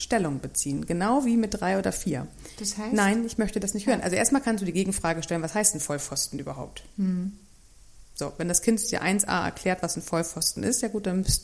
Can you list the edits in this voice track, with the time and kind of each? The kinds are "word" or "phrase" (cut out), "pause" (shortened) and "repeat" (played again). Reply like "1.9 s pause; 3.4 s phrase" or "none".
8.1 s pause